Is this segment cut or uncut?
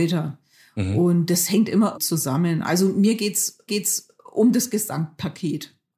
cut